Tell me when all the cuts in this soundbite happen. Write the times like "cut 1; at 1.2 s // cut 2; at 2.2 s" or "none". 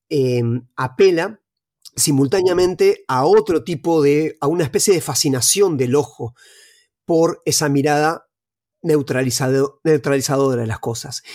none